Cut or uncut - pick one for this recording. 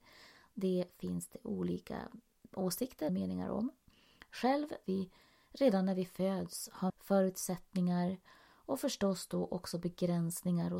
cut